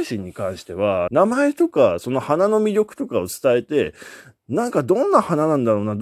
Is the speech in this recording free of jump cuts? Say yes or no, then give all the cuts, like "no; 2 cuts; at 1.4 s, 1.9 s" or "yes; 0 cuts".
no; 1 cut; at 1.1 s